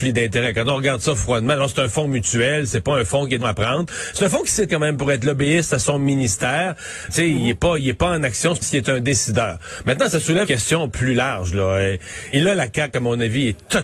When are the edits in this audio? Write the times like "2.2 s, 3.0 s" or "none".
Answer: 3.4 s, 4.7 s, 7.1 s, 8.6 s, 10.5 s, 12.3 s